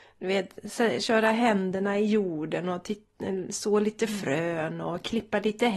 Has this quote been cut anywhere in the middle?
no; 0 cuts

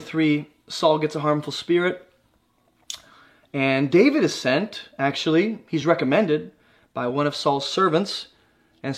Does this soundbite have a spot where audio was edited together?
no; 0 cuts

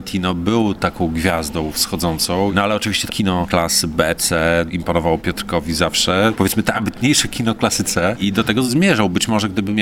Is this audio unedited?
no; 2 cuts; at 3.1 s, 4.2 s

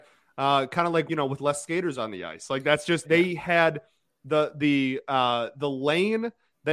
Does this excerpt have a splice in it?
yes; 2 cuts; at 1.1 s, 3.0 s

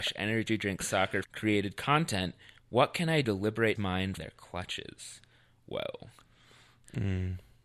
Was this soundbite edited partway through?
yes; 4 cuts; at 1.2 s, 3.2 s, 3.8 s, 4.2 s

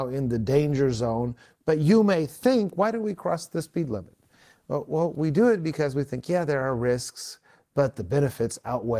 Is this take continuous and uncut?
yes; 0 cuts

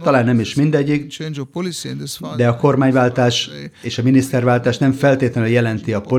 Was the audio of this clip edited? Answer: no; 0 cuts

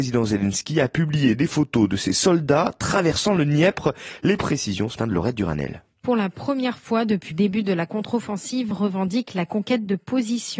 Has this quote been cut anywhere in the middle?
yes; 3 cuts; at 5.0 s, 7.3 s, 8.7 s

